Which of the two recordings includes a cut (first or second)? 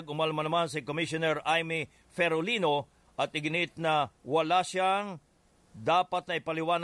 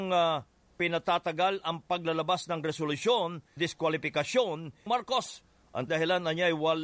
second